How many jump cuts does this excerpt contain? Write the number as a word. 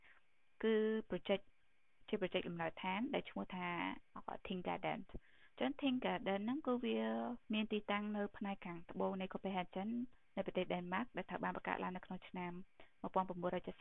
two